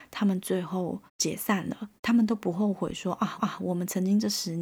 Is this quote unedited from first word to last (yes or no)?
no